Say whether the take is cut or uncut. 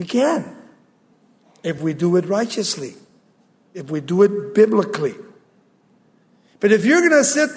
uncut